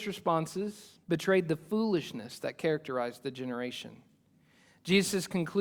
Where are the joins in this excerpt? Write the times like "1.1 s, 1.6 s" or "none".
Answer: 1.0 s